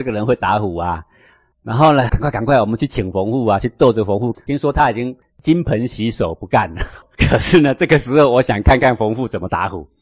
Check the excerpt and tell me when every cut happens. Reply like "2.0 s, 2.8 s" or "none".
2.1 s